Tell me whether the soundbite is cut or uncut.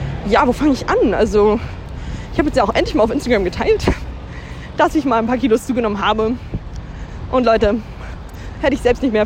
uncut